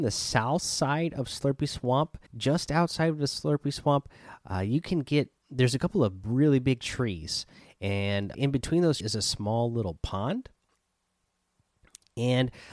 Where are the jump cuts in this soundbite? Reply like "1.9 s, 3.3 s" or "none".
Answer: 2.3 s, 8.3 s, 9.0 s